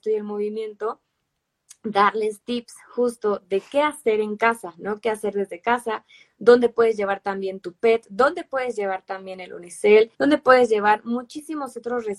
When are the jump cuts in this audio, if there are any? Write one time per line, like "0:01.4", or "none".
0:07.6
0:10.1